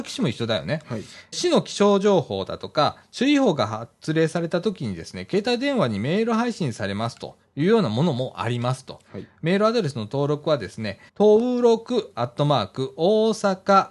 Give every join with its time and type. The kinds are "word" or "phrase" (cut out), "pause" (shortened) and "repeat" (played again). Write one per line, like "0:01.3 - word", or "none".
0:01.3 - phrase
0:11.1 - pause